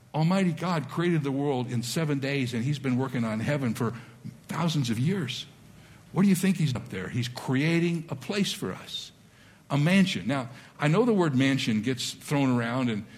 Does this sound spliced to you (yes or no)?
yes